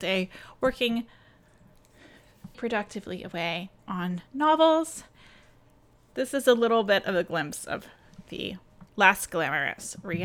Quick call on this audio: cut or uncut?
cut